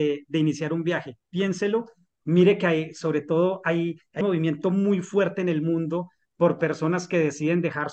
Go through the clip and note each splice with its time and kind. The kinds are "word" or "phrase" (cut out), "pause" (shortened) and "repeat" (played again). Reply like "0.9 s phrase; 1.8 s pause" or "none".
4.2 s word